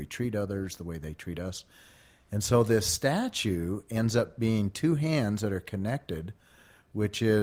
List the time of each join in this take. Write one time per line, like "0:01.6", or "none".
none